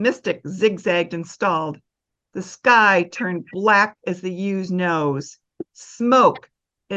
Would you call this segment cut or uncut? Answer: uncut